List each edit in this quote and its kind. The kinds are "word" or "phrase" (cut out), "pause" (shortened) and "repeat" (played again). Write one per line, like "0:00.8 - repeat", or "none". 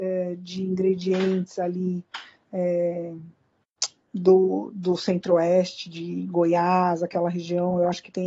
none